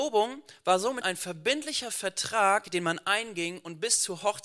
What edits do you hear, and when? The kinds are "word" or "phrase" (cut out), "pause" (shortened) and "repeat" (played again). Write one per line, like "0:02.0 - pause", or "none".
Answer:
0:01.0 - word